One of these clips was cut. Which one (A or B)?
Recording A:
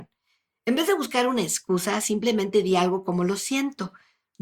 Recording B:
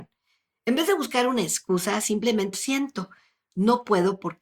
B